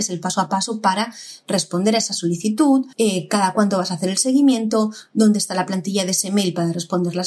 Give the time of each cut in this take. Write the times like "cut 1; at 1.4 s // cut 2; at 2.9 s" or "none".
cut 1; at 2.9 s